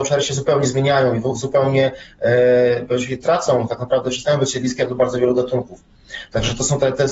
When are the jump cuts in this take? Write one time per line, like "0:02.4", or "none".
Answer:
none